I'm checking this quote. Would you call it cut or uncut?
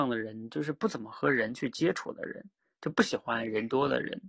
uncut